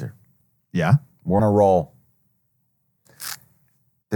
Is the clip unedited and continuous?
no; 1 cut; at 1.4 s

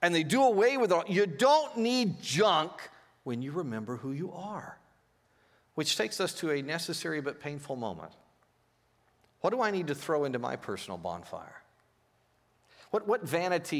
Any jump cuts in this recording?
no; 0 cuts

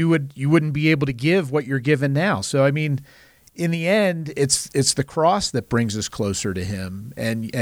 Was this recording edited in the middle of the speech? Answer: no; 0 cuts

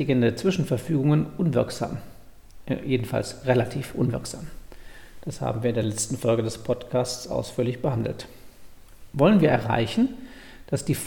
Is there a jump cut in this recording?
no; 0 cuts

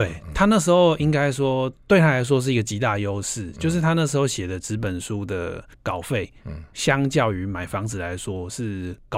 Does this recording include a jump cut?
yes; 1 cut; at 5.7 s

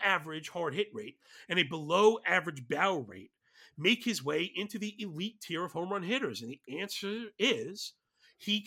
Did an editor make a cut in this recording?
no; 0 cuts

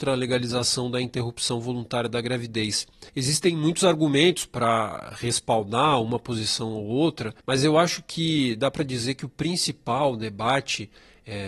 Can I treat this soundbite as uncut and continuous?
no; 2 cuts; at 3.1 s, 7.4 s

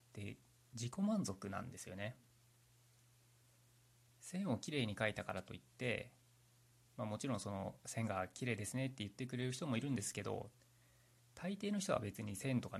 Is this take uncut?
yes; 0 cuts

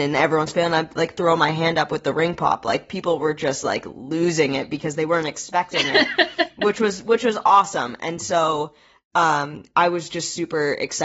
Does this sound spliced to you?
no; 0 cuts

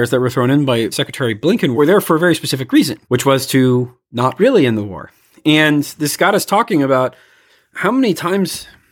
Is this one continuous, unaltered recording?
no; 1 cut; at 3.0 s

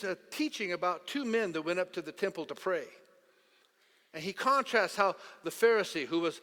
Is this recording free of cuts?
yes; 0 cuts

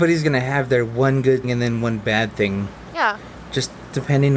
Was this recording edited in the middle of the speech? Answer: yes; 1 cut; at 1.4 s

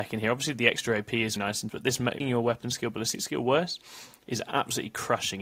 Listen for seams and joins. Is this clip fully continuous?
no; 3 cuts; at 1.4 s, 1.7 s, 2.2 s

